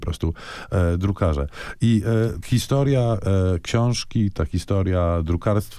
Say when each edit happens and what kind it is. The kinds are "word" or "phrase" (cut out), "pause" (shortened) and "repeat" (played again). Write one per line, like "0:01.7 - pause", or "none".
0:02.4 - word